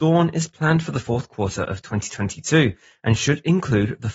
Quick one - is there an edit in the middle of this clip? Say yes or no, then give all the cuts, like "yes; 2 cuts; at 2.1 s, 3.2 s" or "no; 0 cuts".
no; 0 cuts